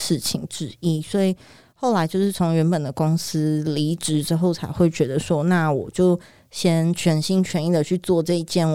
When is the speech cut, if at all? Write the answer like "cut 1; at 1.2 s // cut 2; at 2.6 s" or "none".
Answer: none